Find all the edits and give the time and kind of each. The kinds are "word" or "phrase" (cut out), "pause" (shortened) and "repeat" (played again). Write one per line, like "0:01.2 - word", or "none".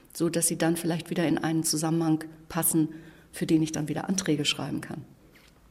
none